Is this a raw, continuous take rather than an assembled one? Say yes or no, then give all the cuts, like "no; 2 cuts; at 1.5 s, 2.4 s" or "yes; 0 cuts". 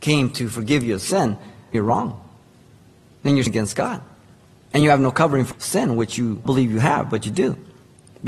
no; 4 cuts; at 1.7 s, 3.5 s, 5.5 s, 6.5 s